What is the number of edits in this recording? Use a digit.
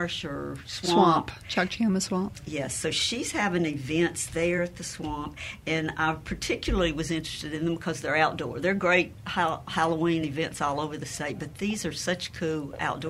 0